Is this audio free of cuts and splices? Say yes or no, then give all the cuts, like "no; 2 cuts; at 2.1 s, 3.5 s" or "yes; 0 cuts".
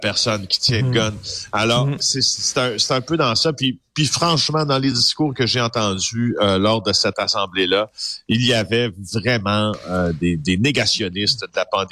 yes; 0 cuts